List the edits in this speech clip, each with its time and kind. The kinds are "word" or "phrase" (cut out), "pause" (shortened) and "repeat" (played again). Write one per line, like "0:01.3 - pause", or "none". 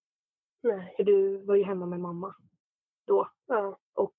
none